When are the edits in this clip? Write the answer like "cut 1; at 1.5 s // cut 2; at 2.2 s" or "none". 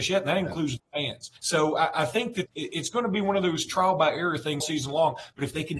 cut 1; at 1.4 s // cut 2; at 2.5 s // cut 3; at 4.6 s